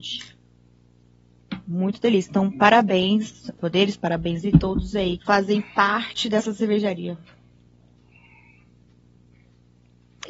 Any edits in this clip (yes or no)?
yes